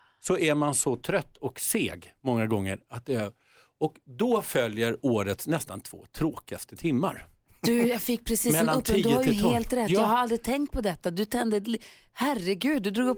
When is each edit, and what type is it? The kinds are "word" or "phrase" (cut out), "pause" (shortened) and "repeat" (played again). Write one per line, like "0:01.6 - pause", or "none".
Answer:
none